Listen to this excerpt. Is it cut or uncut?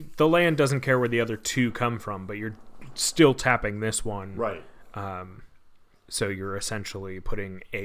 uncut